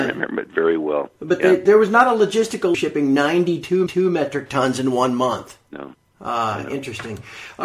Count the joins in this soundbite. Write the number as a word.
three